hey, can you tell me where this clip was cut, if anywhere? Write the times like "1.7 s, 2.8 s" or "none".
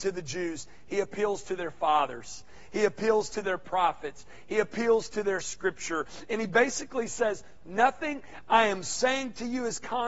none